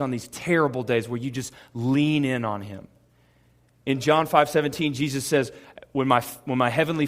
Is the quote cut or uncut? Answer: uncut